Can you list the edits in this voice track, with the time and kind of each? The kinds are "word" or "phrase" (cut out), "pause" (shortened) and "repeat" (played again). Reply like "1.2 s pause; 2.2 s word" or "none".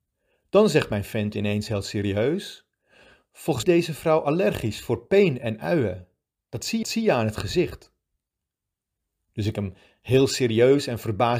3.6 s phrase; 6.8 s repeat; 9.5 s word